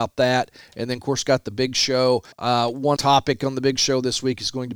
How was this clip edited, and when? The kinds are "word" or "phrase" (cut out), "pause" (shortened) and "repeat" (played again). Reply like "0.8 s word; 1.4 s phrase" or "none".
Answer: 2.3 s pause; 3.0 s word